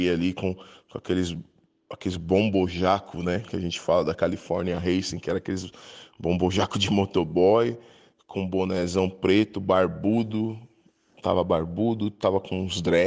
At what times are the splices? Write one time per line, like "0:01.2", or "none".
0:11.2